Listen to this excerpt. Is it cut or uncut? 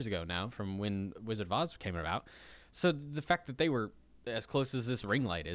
uncut